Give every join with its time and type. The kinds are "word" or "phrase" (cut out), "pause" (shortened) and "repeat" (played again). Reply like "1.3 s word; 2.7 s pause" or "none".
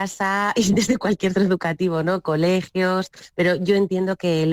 1.3 s word